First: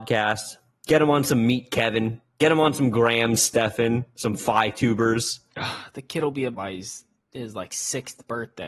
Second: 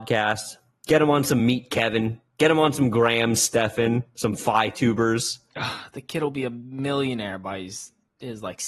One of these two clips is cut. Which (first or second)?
first